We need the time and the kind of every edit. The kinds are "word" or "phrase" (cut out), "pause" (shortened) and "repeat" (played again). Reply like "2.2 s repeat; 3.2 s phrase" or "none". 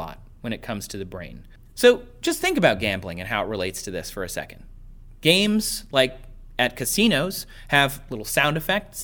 none